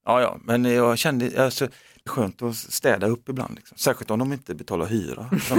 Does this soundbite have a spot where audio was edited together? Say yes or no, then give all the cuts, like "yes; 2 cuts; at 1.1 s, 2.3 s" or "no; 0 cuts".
yes; 1 cut; at 2.1 s